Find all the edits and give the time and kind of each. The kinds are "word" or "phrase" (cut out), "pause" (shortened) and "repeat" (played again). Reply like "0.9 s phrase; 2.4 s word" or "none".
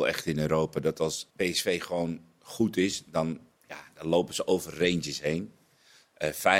1.3 s pause; 3.6 s pause